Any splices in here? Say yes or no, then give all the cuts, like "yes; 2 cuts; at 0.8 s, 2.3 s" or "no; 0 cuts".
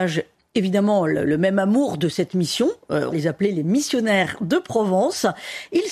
yes; 1 cut; at 3.1 s